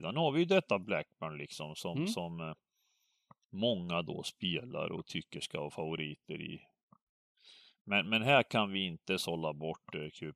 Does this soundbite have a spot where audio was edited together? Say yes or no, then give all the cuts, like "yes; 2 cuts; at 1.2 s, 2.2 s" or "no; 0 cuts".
no; 0 cuts